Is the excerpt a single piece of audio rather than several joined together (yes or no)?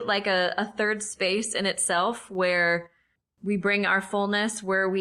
yes